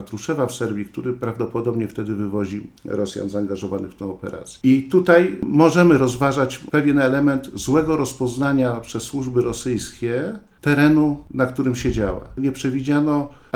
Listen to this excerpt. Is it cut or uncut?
cut